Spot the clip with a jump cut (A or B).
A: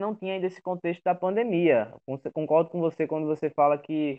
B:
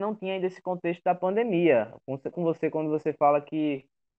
B